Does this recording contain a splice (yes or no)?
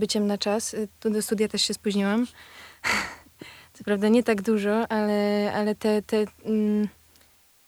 no